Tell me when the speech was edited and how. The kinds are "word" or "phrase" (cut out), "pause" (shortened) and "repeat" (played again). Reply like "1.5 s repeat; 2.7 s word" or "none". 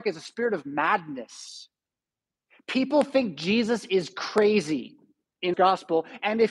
5.5 s word